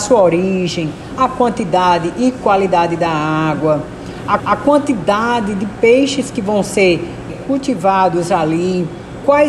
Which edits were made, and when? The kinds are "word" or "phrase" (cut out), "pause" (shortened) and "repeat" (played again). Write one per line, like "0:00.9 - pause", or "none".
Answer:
0:04.4 - repeat
0:07.3 - word